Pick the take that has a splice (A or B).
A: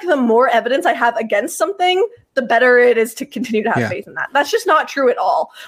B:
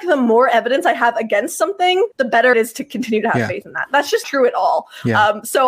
B